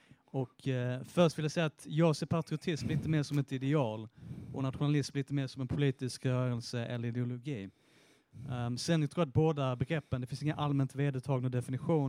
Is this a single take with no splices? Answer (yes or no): yes